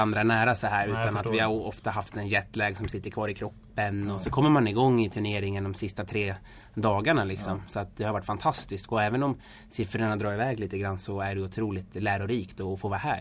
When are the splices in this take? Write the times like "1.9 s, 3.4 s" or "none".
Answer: none